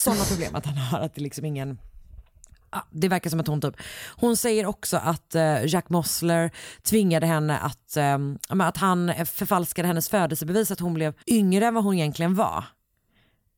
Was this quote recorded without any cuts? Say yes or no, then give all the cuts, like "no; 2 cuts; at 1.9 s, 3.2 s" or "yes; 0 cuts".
no; 1 cut; at 11.2 s